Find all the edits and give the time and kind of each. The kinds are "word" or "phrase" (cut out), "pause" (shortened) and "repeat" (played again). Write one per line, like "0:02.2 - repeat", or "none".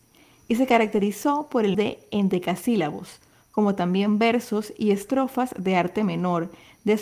0:01.7 - word